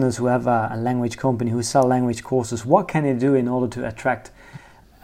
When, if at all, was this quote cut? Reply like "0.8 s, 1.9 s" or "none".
none